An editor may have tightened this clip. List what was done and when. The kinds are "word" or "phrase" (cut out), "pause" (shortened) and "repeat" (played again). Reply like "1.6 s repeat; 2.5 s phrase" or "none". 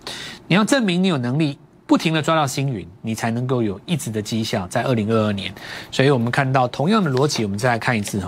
none

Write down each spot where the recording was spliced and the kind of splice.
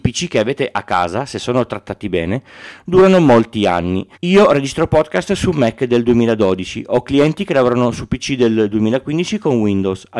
4.1 s pause

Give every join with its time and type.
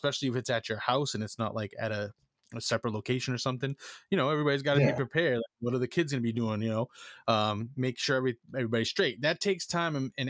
none

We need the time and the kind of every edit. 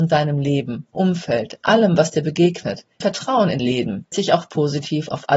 0.9 s word; 3.0 s word; 3.6 s word; 4.1 s word

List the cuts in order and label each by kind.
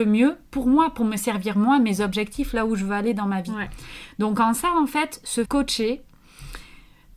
5.4 s word

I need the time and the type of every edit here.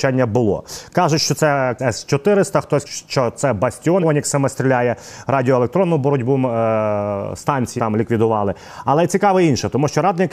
1.8 s word; 2.9 s word; 4.0 s word; 7.8 s word

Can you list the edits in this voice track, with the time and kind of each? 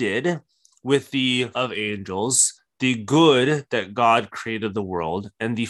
1.5 s word

